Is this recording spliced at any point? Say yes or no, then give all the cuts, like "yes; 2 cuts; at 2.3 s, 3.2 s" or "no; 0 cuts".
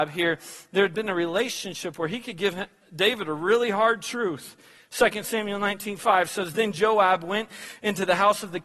no; 0 cuts